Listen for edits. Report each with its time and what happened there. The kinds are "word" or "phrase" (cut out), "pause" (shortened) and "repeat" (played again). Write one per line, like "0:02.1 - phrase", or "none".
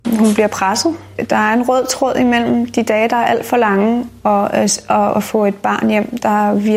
none